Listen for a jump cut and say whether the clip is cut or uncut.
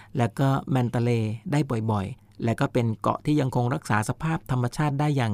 uncut